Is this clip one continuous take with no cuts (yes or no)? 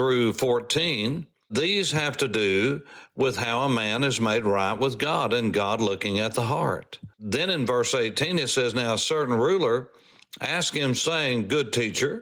no